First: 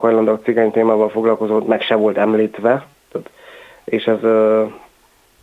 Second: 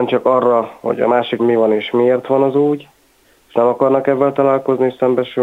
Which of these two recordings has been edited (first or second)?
second